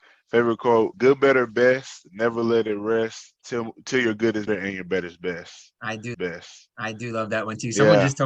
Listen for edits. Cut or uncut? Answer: cut